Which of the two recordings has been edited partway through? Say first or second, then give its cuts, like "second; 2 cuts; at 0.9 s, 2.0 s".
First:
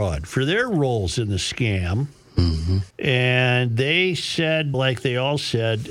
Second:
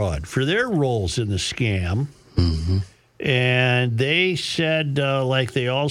first; 2 cuts; at 2.9 s, 4.7 s